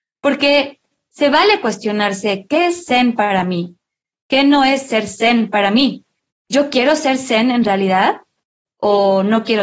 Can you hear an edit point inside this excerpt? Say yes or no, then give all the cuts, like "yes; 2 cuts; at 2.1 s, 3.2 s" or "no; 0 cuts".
no; 0 cuts